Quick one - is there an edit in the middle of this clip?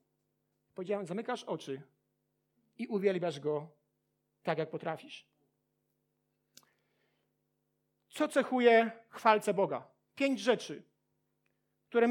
no; 0 cuts

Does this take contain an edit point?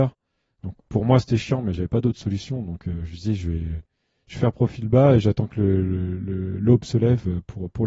no; 0 cuts

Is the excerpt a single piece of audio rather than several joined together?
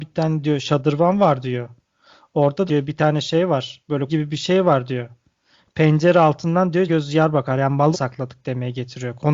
no; 4 cuts; at 2.7 s, 4.1 s, 6.9 s, 7.9 s

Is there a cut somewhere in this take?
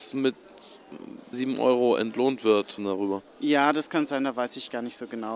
yes; 3 cuts; at 1.3 s, 2.8 s, 3.3 s

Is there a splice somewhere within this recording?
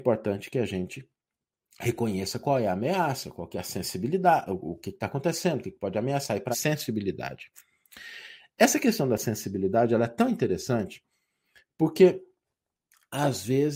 yes; 1 cut; at 6.5 s

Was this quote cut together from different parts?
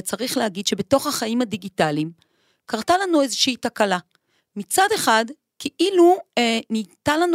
no; 0 cuts

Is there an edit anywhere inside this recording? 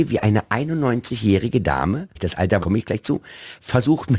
yes; 2 cuts; at 2.2 s, 2.6 s

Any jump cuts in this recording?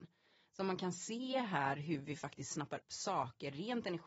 yes; 1 cut; at 2.8 s

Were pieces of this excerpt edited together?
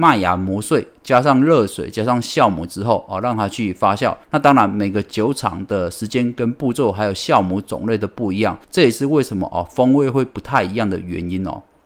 yes; 2 cuts; at 4.2 s, 8.6 s

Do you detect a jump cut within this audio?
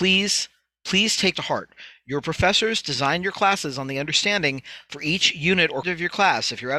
yes; 3 cuts; at 1.3 s, 4.9 s, 5.8 s

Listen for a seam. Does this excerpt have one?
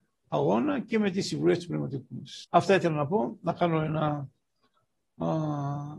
yes; 1 cut; at 2.4 s

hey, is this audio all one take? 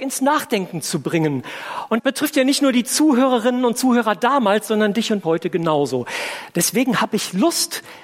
no; 2 cuts; at 2.0 s, 5.2 s

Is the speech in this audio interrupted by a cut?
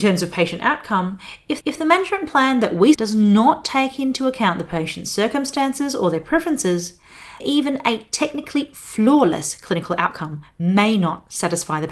yes; 3 cuts; at 1.6 s, 2.9 s, 7.4 s

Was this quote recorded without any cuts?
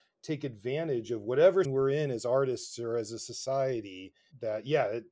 no; 1 cut; at 1.6 s

